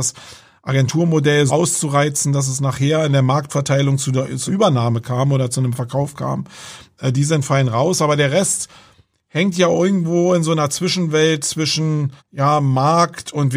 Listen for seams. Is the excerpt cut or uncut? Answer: cut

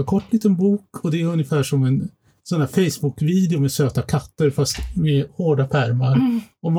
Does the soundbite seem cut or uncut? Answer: uncut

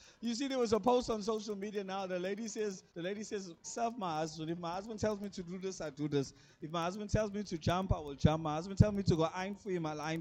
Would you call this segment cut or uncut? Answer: cut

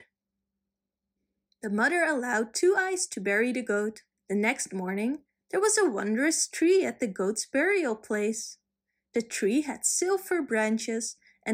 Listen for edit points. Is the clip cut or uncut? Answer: cut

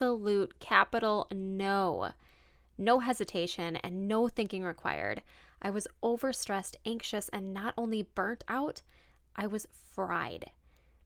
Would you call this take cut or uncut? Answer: uncut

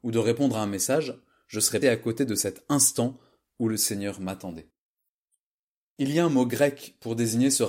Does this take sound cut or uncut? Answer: cut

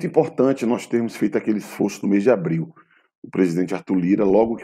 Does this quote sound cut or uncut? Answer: uncut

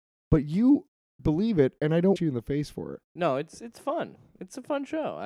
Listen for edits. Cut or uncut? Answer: cut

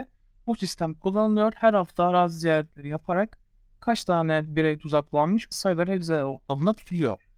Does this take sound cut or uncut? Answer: cut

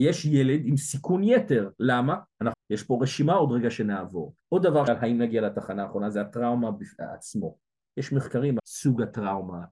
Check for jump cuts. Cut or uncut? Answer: cut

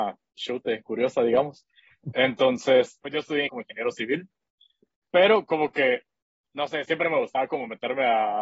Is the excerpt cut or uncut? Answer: cut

